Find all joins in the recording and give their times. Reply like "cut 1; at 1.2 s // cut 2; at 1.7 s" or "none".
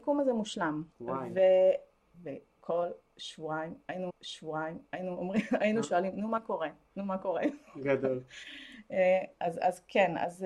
cut 1; at 0.9 s // cut 2; at 2.1 s // cut 3; at 4.1 s